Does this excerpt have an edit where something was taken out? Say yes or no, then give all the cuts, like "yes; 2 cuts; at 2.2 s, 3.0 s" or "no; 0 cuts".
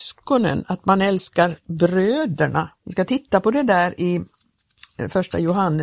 yes; 1 cut; at 2.8 s